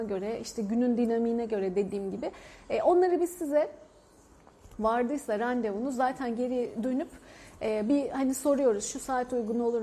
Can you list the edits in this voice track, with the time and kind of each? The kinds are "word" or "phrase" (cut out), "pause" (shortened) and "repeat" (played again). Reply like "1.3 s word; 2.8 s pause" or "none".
none

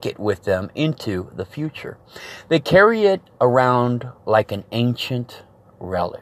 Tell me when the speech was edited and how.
4.2 s pause

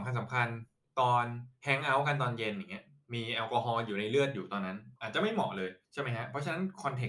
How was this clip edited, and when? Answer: 5.0 s pause; 5.8 s pause

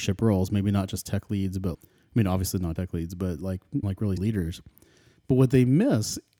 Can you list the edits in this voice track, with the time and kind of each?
1.7 s word; 2.8 s word; 3.8 s word; 4.2 s word

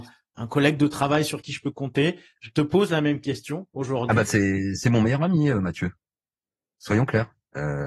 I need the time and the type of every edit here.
none

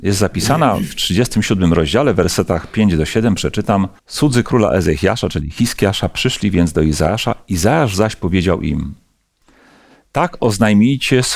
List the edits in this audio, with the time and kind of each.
4.0 s pause

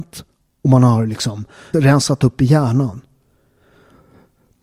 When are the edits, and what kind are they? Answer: 1.7 s word

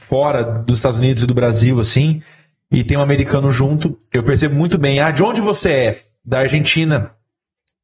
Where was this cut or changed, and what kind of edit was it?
none

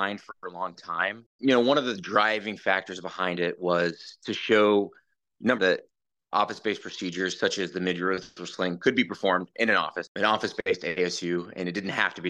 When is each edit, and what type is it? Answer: 5.6 s word

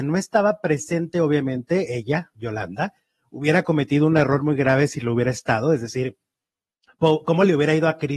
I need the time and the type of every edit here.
none

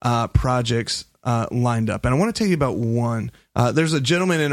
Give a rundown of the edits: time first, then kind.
none

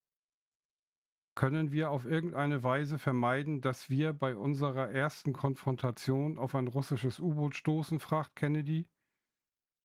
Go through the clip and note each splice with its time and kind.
none

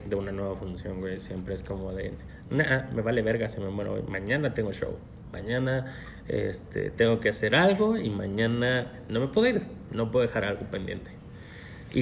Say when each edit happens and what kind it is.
none

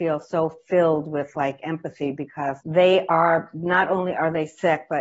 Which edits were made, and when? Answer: 2.6 s pause

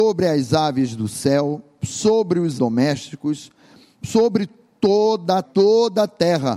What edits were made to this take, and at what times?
2.6 s word; 5.4 s word

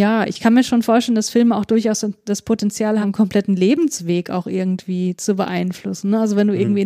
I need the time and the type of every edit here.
3.0 s phrase

